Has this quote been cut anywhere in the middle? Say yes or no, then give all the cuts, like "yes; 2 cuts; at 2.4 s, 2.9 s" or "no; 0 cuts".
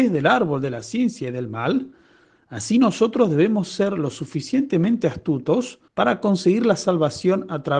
yes; 1 cut; at 5.9 s